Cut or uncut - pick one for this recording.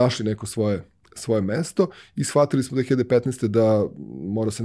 uncut